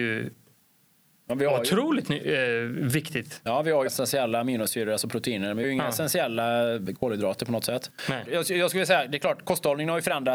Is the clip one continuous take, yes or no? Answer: no